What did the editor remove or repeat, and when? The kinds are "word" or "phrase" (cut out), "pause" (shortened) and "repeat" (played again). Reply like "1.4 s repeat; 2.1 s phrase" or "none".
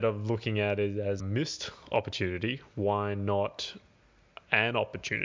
1.2 s word